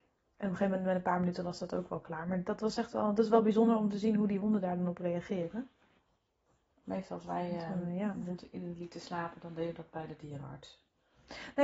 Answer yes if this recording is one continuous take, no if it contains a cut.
yes